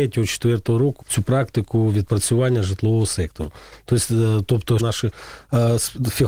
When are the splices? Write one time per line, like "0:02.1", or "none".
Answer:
0:01.0
0:04.8

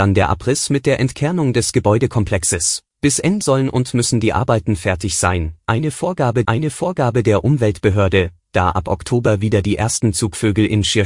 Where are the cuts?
0:02.9
0:03.4
0:06.4

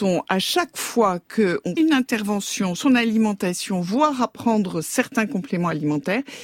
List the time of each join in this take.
0:01.8
0:02.8

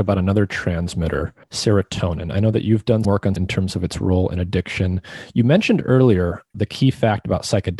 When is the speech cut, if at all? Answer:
0:01.4
0:03.0
0:03.4
0:06.5

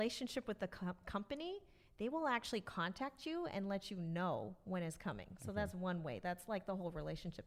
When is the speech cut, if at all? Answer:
none

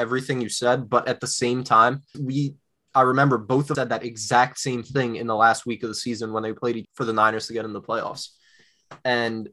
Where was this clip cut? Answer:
0:02.1
0:03.7
0:06.8

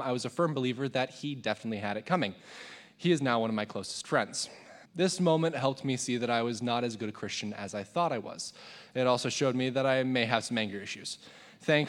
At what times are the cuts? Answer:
0:04.8

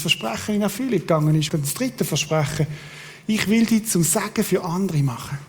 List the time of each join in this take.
0:01.5

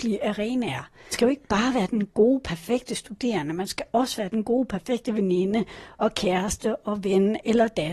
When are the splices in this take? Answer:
0:01.1

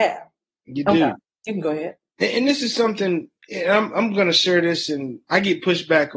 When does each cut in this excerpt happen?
none

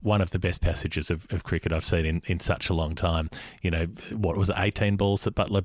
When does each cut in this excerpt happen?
none

